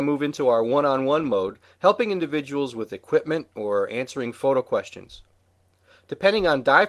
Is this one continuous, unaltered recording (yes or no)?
yes